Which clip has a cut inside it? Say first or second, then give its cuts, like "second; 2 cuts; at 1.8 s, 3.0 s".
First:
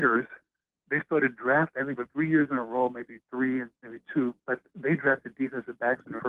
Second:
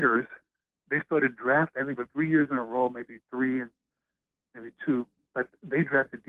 first; 2 cuts; at 3.7 s, 4.4 s